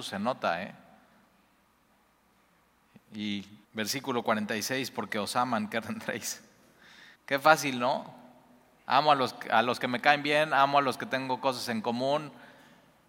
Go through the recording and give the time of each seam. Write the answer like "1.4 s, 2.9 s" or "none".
3.6 s, 5.1 s, 5.8 s, 7.2 s